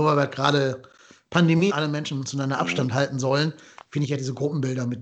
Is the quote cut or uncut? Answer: cut